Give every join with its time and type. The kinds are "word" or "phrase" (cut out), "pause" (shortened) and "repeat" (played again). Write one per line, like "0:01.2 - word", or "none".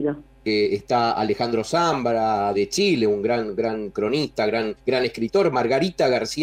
0:02.5 - word
0:04.8 - pause